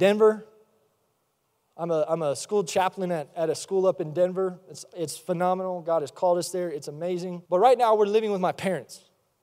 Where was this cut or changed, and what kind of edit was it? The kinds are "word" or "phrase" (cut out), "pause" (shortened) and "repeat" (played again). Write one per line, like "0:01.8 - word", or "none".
0:07.5 - pause